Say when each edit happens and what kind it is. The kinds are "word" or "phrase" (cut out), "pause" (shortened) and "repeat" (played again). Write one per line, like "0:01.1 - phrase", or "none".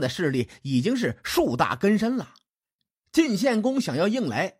none